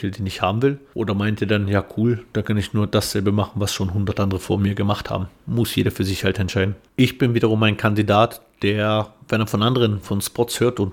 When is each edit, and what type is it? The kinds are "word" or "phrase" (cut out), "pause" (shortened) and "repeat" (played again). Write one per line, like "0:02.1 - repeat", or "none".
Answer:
none